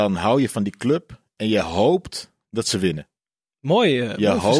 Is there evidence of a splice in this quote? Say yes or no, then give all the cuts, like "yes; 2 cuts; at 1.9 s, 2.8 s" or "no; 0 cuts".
no; 0 cuts